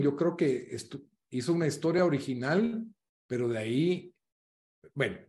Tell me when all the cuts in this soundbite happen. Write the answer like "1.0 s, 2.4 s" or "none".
none